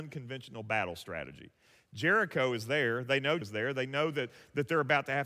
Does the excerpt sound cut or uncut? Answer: cut